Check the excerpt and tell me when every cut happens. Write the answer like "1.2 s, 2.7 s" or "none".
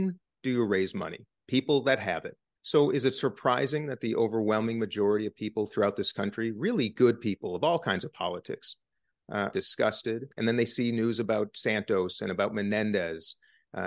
2.5 s, 9.5 s, 10.3 s